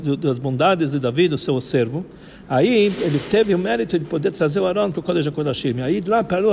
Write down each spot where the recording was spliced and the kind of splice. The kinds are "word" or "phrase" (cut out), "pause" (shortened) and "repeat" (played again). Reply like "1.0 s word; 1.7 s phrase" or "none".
none